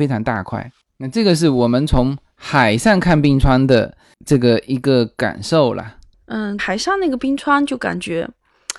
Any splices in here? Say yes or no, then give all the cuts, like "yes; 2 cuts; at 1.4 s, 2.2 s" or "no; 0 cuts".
yes; 1 cut; at 6.6 s